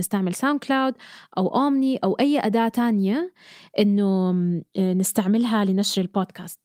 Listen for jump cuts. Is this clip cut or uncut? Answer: uncut